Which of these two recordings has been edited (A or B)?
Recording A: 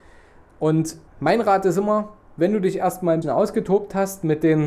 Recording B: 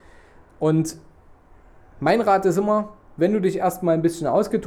A